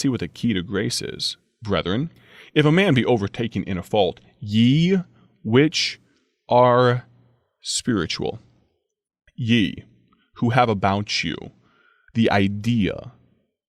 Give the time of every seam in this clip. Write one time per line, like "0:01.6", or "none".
none